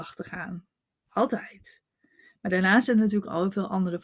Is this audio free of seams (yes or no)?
yes